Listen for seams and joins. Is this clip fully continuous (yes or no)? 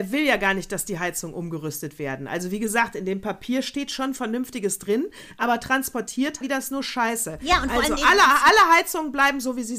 no